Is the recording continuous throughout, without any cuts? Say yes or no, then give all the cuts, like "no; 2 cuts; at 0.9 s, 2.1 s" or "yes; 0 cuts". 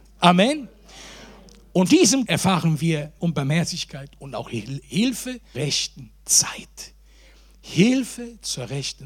no; 4 cuts; at 1.9 s, 2.2 s, 3.2 s, 5.5 s